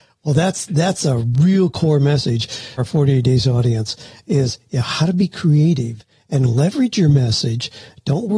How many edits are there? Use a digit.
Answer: 1